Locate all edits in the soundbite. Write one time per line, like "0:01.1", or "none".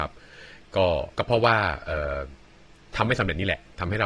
0:01.1